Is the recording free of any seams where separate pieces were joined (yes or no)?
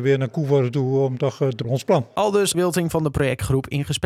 no